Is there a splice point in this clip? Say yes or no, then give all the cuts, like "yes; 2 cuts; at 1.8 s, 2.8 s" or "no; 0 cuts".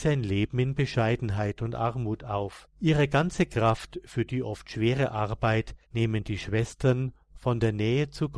yes; 2 cuts; at 2.7 s, 5.8 s